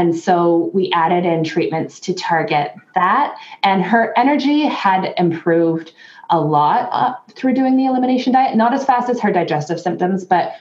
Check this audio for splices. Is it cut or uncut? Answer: uncut